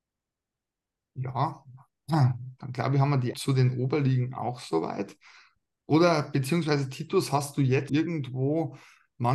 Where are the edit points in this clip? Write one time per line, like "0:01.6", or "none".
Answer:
0:03.3
0:07.9